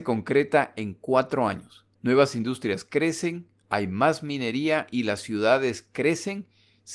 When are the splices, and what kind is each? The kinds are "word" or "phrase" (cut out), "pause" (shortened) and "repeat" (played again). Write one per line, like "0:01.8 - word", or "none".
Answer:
0:01.9 - pause

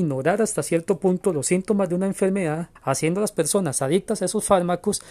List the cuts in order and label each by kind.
0:02.8 - pause

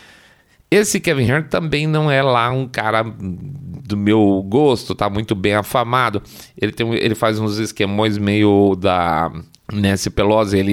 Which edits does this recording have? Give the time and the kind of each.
none

